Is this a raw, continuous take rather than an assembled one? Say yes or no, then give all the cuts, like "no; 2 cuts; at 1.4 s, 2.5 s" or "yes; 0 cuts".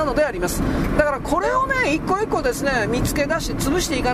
yes; 0 cuts